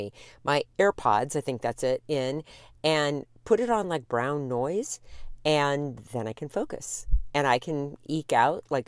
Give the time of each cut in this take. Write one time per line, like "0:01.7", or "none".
none